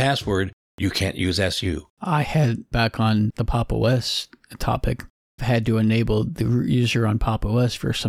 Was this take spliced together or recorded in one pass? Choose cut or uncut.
cut